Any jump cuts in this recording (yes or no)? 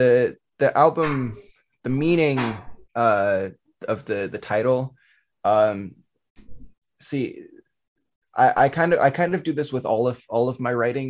yes